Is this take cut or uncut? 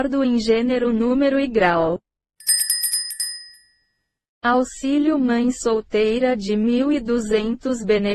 uncut